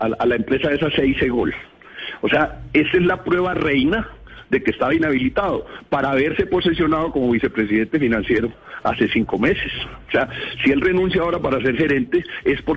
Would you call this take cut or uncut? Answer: uncut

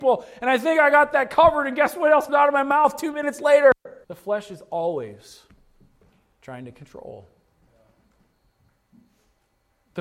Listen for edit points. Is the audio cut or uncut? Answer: cut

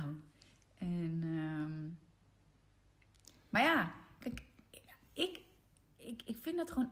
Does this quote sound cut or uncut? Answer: uncut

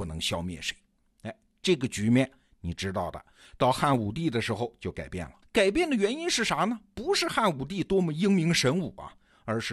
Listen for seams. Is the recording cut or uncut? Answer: cut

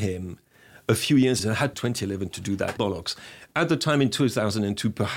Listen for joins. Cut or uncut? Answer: cut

